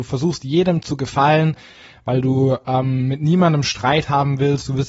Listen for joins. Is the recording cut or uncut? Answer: uncut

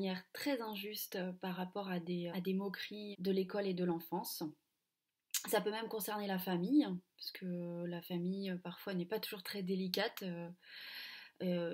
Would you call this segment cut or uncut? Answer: cut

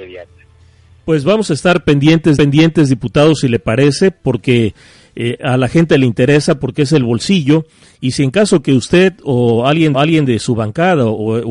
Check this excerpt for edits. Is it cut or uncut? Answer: cut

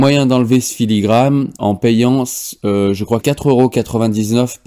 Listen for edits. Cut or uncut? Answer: cut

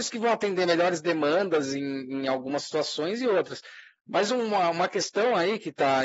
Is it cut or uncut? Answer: uncut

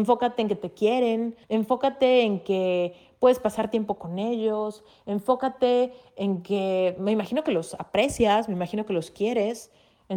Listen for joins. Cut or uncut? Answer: cut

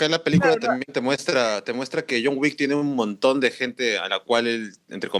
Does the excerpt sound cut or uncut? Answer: uncut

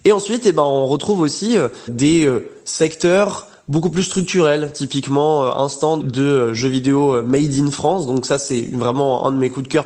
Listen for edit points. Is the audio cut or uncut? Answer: cut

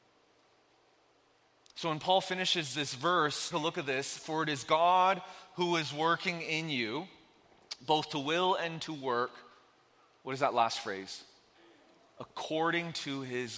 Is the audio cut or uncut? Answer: cut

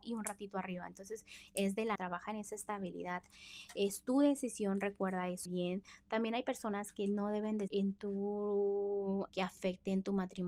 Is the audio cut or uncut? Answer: cut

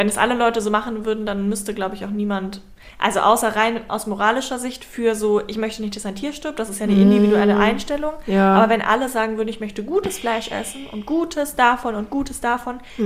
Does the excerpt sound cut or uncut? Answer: uncut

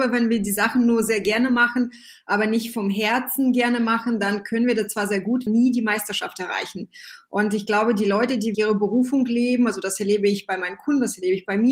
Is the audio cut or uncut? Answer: cut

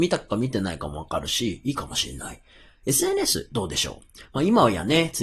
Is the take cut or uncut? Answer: uncut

